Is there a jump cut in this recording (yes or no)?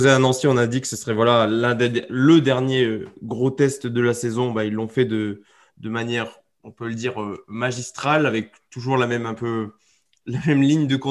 no